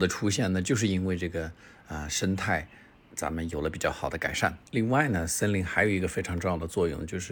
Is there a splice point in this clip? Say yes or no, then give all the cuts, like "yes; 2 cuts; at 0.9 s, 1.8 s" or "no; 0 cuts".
yes; 1 cut; at 4.7 s